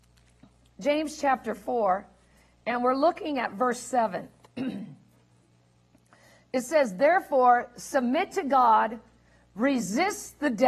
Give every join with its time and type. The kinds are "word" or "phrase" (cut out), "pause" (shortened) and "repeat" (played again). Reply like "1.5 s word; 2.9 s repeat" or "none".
none